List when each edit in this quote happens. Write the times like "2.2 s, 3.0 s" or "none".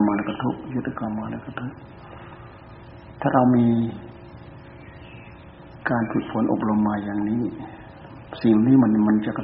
5.8 s